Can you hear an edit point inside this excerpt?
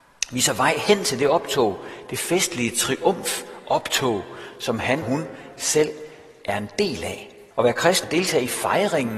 yes; 3 cuts; at 5.0 s, 7.5 s, 8.0 s

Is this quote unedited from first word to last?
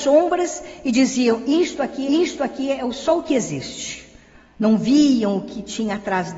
no; 1 cut; at 2.1 s

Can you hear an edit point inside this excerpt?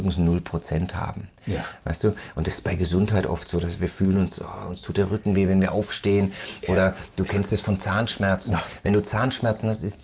no; 0 cuts

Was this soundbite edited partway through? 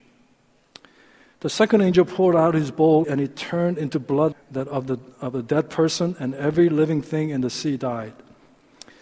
yes; 2 cuts; at 3.0 s, 4.3 s

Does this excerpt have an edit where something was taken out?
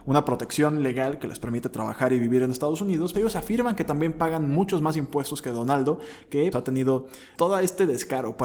yes; 3 cuts; at 3.1 s, 6.5 s, 7.3 s

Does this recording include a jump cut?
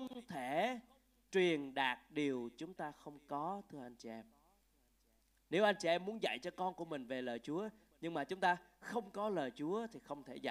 no; 0 cuts

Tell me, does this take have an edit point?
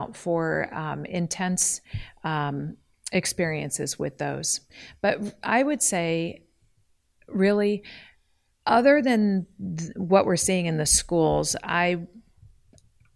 no; 0 cuts

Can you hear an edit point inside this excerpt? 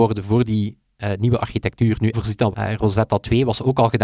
yes; 2 cuts; at 2.1 s, 2.5 s

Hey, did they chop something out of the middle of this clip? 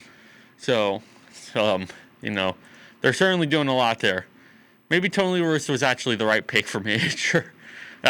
no; 0 cuts

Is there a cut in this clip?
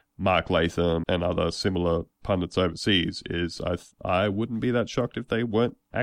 yes; 2 cuts; at 1.0 s, 2.1 s

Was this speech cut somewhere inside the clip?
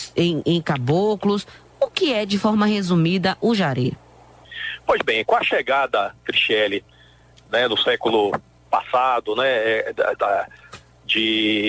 no; 0 cuts

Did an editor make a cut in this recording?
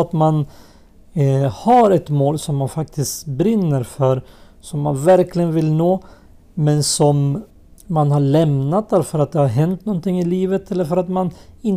no; 0 cuts

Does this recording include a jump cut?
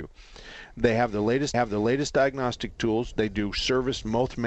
yes; 1 cut; at 1.5 s

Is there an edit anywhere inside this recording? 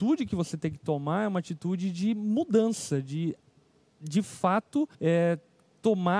yes; 1 cut; at 4.9 s

